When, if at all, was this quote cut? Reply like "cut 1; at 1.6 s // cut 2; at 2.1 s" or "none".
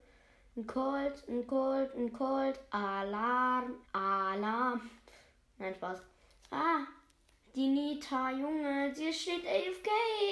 cut 1; at 3.8 s